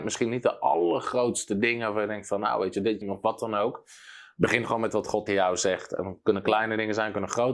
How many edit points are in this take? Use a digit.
2